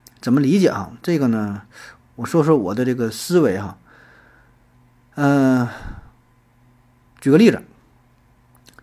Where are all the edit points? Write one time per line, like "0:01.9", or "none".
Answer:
none